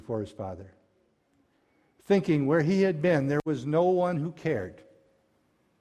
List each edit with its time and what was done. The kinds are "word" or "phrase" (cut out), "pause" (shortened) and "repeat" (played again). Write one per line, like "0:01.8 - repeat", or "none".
none